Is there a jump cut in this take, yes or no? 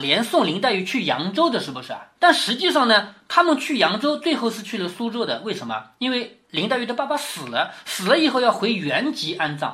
yes